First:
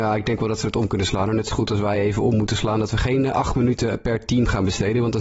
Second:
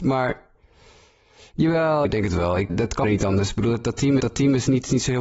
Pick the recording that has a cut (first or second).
second